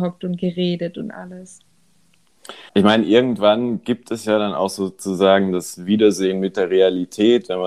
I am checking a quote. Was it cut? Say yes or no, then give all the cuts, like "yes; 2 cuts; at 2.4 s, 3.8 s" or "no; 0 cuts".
yes; 1 cut; at 2.7 s